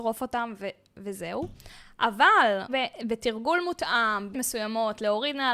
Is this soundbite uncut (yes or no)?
no